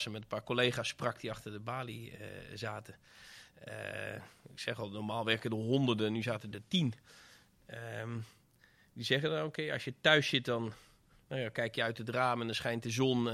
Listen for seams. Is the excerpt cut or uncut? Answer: uncut